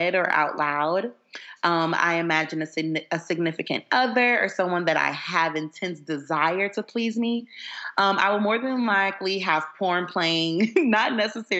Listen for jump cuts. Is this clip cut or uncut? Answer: uncut